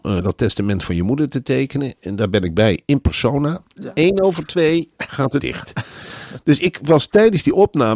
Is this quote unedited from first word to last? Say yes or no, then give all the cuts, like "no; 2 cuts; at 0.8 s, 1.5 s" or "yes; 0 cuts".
no; 2 cuts; at 4.9 s, 5.4 s